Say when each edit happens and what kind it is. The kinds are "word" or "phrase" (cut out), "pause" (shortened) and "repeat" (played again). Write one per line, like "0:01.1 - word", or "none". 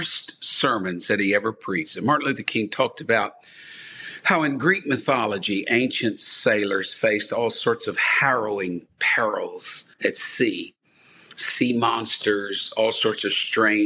0:09.9 - pause